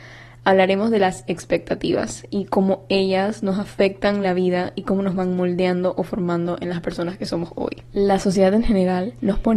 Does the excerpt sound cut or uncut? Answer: uncut